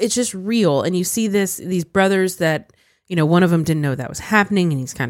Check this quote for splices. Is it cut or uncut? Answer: uncut